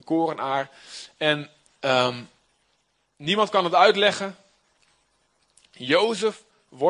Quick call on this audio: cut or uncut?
uncut